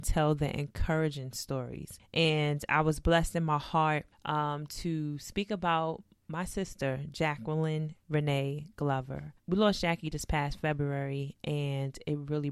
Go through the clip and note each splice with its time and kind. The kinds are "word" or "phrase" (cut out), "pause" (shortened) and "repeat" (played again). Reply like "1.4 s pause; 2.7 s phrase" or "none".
9.4 s pause